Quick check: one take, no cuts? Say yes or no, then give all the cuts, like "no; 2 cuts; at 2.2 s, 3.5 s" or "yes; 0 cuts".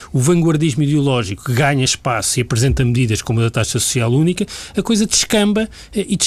yes; 0 cuts